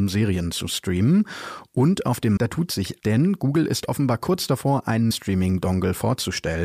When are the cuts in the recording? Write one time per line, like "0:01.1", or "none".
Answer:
0:02.4
0:03.0
0:05.1